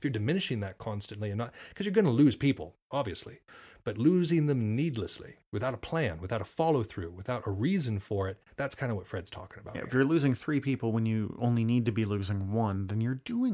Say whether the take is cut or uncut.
cut